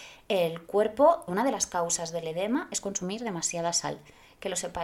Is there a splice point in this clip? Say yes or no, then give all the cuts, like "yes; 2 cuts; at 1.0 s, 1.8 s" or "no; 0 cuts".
yes; 1 cut; at 1.3 s